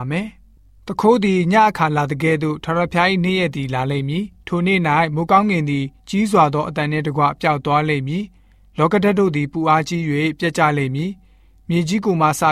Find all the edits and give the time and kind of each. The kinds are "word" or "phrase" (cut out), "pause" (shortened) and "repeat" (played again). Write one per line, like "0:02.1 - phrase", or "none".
none